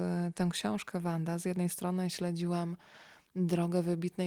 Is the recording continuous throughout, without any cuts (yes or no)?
yes